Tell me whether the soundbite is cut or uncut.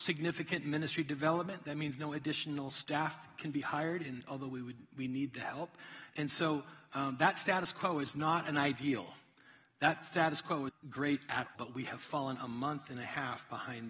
cut